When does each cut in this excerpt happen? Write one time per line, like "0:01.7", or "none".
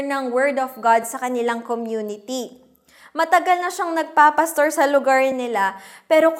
none